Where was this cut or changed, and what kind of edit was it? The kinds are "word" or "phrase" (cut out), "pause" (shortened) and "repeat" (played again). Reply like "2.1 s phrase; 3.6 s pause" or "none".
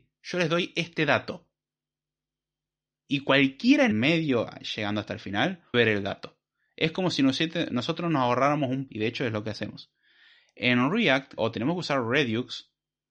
3.9 s word; 5.7 s word; 8.9 s word; 11.4 s word

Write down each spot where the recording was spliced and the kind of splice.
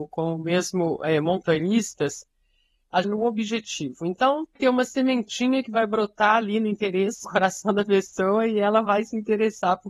3.0 s phrase; 4.6 s word; 7.2 s word

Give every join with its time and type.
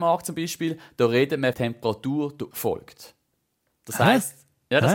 1.5 s phrase; 2.5 s word

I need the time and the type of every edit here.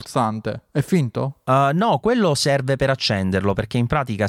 none

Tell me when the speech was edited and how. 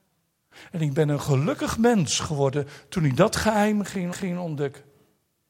4.1 s repeat

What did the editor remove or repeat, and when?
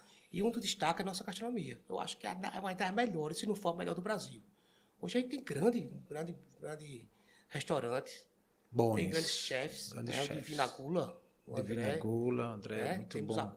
5.9 s word

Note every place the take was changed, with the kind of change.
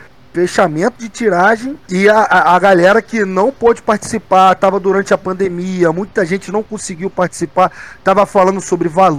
1.8 s pause

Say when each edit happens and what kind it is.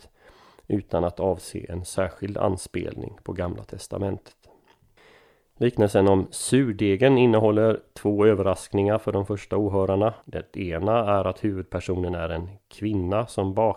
5.0 s pause; 10.2 s pause

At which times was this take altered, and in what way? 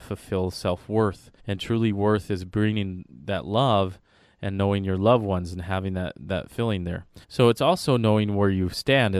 1.4 s pause; 7.2 s pause

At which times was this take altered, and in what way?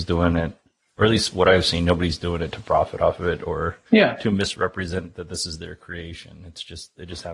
3.9 s pause

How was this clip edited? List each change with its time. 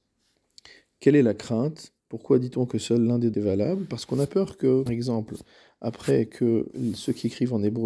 2.0 s pause; 3.3 s word; 4.9 s word

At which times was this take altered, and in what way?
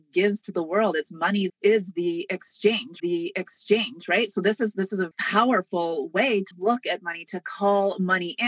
1.5 s word; 3.0 s repeat; 5.1 s word; 6.5 s word

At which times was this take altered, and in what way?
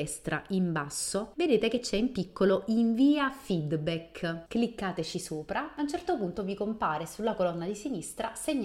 none

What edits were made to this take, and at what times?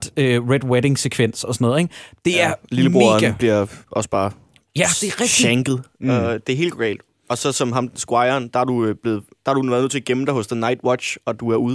none

